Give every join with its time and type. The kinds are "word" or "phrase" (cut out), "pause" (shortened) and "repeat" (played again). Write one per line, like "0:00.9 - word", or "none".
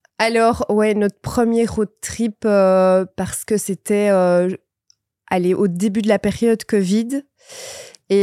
none